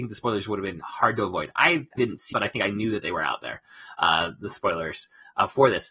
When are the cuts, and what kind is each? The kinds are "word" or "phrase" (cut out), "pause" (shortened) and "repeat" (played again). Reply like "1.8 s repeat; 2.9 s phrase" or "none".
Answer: 2.0 s phrase; 2.3 s word

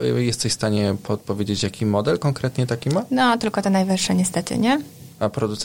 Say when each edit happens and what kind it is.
none

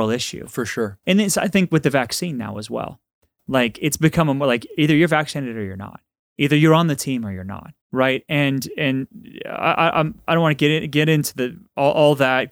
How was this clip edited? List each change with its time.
7.8 s pause

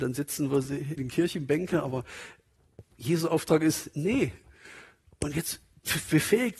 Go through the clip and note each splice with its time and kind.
1.0 s word

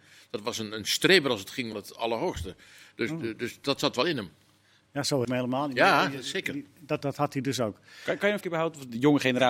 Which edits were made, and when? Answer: 1.7 s phrase; 5.2 s phrase; 7.0 s word; 8.4 s word

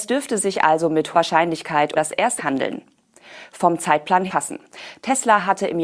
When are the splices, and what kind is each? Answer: 1.1 s word; 1.9 s word; 2.4 s word; 4.3 s phrase

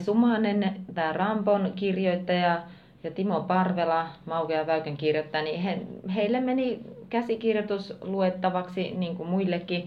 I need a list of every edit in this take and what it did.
none

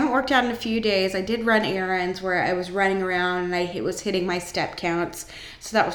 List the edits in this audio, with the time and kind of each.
none

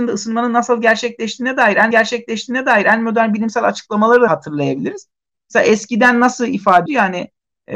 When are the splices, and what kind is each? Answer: 1.9 s repeat; 4.3 s word; 6.9 s word

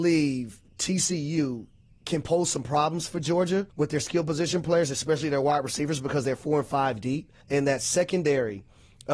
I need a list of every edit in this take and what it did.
1.8 s pause; 3.7 s pause; 7.4 s pause

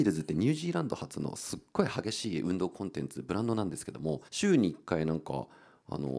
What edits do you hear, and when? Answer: 4.3 s pause

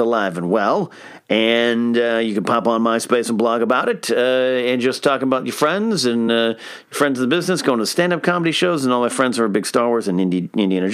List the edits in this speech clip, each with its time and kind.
none

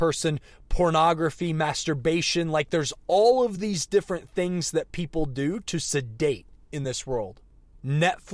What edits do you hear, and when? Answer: none

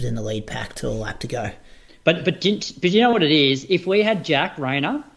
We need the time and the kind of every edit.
none

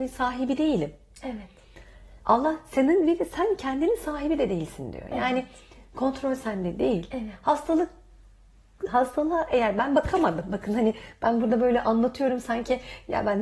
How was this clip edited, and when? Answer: none

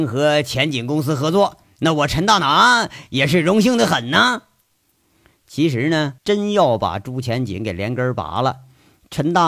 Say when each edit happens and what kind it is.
6.2 s pause

